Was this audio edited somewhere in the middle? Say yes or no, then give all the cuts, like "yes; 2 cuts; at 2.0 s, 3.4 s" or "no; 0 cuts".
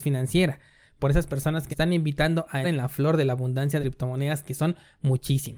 yes; 3 cuts; at 1.7 s, 2.6 s, 3.8 s